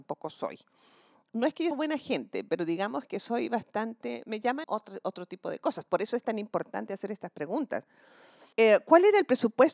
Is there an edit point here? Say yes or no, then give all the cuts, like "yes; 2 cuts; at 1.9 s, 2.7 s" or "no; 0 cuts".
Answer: yes; 3 cuts; at 1.7 s, 4.6 s, 8.5 s